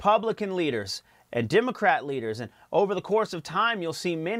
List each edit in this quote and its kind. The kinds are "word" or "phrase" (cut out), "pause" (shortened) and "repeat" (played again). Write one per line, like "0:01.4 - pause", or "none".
none